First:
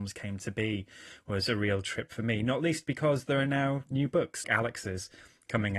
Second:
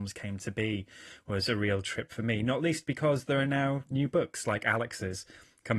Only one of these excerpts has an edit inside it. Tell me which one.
first; 1 cut; at 4.4 s

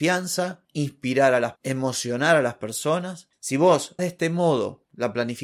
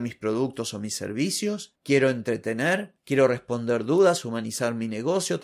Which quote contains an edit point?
first; 2 cuts; at 1.6 s, 4.0 s

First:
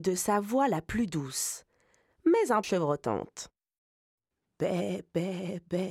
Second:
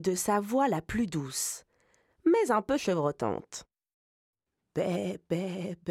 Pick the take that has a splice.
first; 1 cut; at 2.6 s

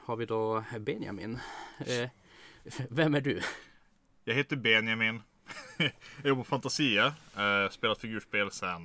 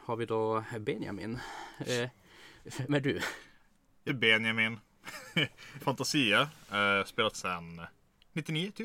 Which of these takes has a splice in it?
second; 4 cuts; at 2.9 s, 4.1 s, 5.8 s, 7.3 s

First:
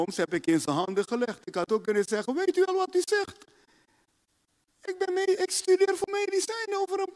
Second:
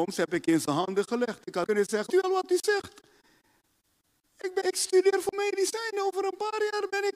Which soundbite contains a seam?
second; 3 cuts; at 1.7 s, 2.1 s, 4.6 s

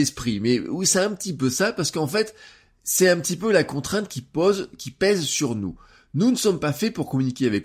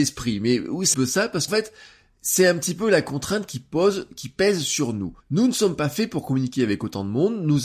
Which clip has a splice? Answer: second; 3 cuts; at 0.9 s, 1.5 s, 5.2 s

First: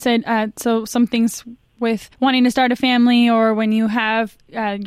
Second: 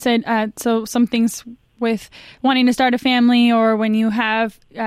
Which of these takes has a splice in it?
first; 1 cut; at 2.1 s

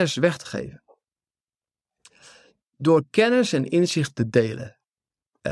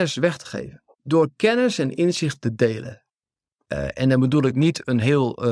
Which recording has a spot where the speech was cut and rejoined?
second; 1 cut; at 0.9 s

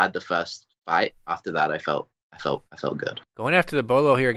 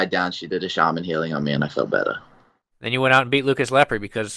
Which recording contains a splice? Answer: first; 2 cuts; at 1.2 s, 3.2 s

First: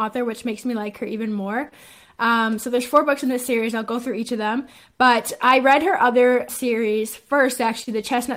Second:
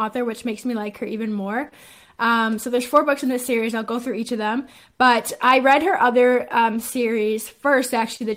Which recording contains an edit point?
first; 1 cut; at 6.5 s

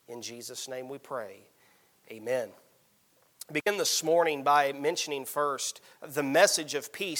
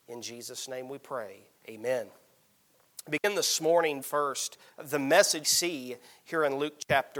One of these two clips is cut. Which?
second; 3 cuts; at 1.6 s, 4.0 s, 5.4 s

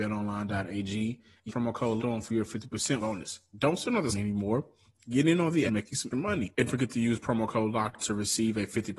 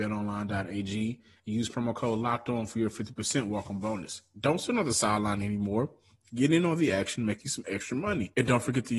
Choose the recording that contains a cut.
first; 8 cuts; at 1.5 s, 2.0 s, 3.0 s, 4.1 s, 5.7 s, 6.1 s, 6.7 s, 8.0 s

